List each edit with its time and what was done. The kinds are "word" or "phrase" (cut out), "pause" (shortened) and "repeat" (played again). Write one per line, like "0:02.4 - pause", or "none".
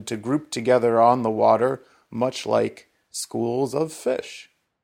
none